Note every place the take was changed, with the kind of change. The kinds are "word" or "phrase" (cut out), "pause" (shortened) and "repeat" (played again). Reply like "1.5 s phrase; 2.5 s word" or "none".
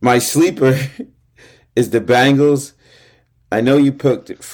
none